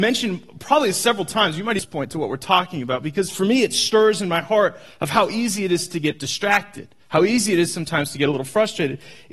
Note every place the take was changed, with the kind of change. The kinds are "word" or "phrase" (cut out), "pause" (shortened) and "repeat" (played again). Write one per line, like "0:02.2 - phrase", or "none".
0:07.0 - pause